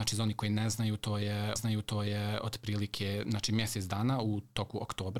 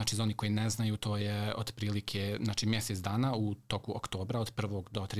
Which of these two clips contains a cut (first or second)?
first